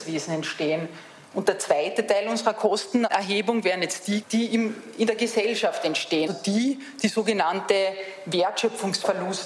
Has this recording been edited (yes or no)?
yes